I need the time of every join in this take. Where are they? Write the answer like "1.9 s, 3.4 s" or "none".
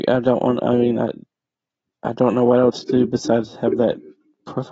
none